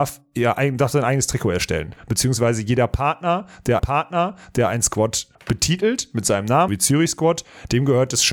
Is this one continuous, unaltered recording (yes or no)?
no